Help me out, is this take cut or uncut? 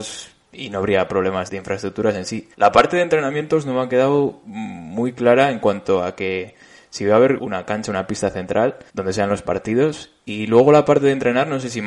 cut